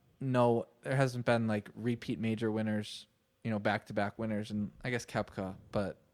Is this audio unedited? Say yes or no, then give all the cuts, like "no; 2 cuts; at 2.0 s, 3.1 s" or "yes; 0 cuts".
no; 1 cut; at 4.7 s